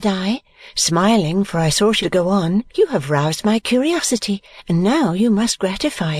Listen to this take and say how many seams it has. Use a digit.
2